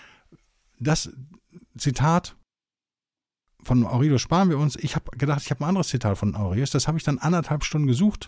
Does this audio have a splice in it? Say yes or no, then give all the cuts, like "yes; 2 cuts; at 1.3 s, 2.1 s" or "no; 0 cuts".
no; 0 cuts